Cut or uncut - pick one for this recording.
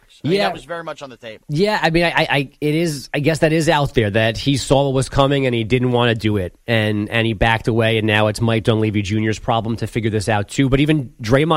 uncut